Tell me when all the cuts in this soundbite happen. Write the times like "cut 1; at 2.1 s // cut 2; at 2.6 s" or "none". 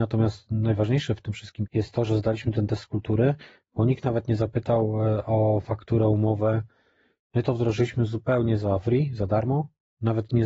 cut 1; at 1.7 s